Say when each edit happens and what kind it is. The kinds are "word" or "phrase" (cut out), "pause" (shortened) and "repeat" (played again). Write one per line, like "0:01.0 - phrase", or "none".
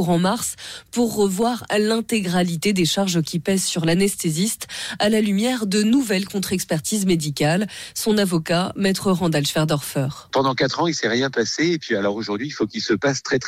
none